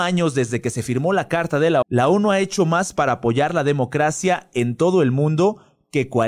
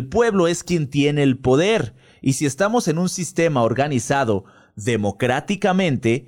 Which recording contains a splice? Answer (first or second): first